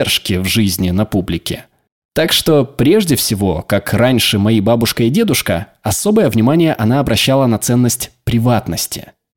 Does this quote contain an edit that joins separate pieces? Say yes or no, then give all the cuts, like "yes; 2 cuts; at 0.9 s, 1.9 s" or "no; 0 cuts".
no; 0 cuts